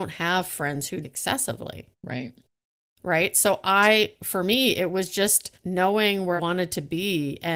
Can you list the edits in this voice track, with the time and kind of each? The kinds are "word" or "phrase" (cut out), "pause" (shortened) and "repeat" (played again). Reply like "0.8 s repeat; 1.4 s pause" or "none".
1.0 s word; 1.9 s pause; 5.6 s pause; 6.4 s word